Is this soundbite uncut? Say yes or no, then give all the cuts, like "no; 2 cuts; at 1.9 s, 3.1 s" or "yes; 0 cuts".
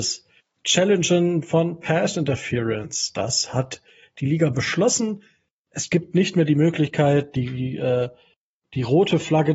yes; 0 cuts